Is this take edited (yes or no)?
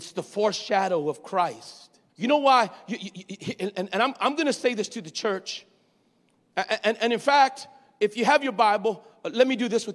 yes